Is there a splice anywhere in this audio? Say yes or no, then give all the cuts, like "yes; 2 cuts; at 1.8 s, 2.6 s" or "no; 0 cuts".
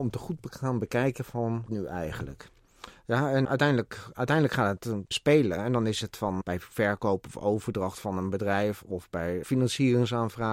yes; 5 cuts; at 1.7 s, 3.4 s, 5.1 s, 6.4 s, 9.4 s